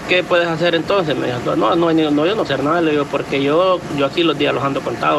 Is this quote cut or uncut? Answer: cut